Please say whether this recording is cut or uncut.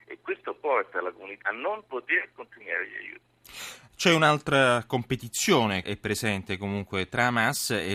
cut